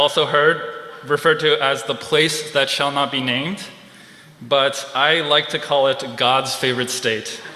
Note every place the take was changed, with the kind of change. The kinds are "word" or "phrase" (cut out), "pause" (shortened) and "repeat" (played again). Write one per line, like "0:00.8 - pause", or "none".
none